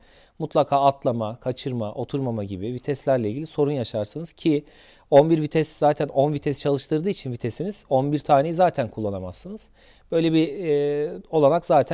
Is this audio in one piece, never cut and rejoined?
yes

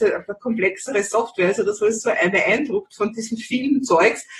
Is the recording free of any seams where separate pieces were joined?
yes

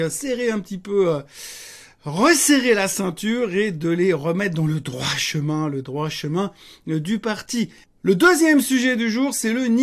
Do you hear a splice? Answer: no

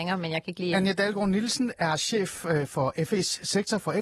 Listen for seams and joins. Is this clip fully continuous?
yes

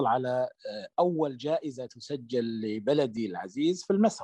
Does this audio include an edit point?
no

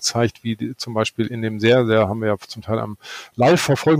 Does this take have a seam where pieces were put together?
no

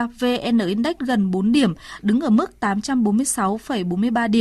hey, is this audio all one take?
no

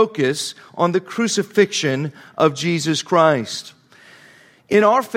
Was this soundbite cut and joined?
no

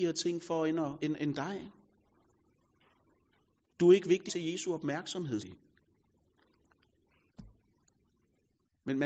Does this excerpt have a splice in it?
yes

